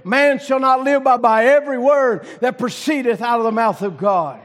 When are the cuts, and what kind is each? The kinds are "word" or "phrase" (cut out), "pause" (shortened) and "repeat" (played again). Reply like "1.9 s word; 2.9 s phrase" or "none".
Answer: 1.2 s phrase